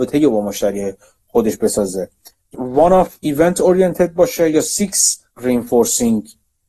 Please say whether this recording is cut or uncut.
cut